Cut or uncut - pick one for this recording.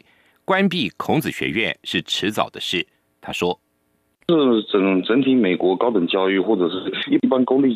uncut